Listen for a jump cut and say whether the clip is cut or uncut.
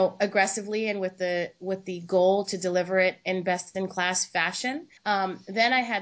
cut